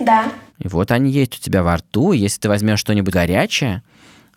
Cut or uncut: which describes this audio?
cut